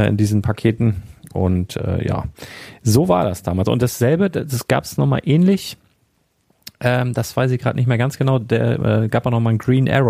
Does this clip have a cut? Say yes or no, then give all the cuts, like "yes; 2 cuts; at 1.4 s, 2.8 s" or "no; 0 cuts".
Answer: no; 0 cuts